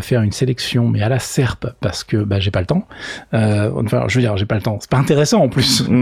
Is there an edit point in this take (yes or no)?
no